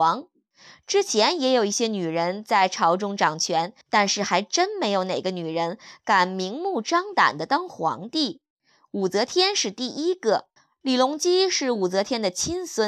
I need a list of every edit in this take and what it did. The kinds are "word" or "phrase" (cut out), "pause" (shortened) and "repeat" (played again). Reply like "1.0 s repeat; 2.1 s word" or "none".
3.8 s pause; 10.6 s pause